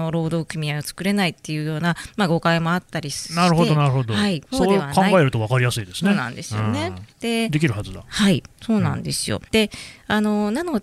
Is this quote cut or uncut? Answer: cut